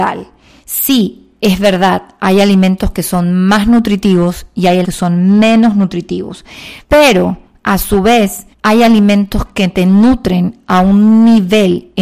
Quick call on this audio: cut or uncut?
cut